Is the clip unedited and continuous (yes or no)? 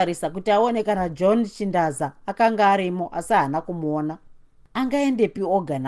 yes